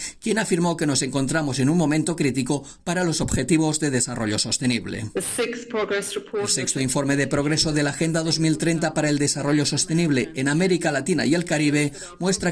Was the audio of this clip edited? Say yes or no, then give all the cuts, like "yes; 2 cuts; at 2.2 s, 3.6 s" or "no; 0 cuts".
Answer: no; 0 cuts